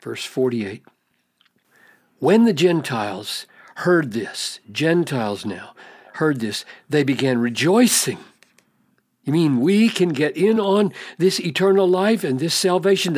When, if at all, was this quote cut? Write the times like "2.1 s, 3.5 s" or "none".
none